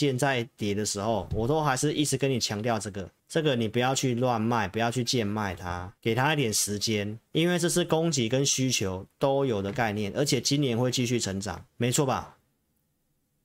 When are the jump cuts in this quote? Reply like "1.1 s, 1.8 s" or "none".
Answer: 3.2 s, 6.0 s, 7.3 s, 11.7 s